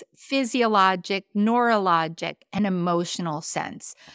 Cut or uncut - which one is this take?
uncut